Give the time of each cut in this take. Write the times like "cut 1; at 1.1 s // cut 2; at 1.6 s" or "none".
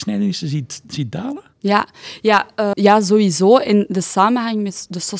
cut 1; at 2.7 s